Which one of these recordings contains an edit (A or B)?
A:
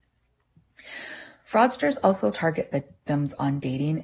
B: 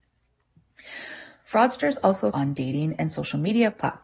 B